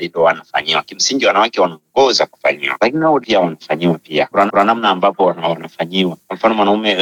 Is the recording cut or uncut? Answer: cut